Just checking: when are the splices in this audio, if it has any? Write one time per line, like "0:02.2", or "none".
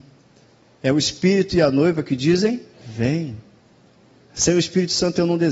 0:02.7